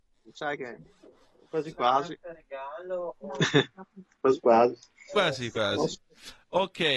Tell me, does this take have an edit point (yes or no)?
no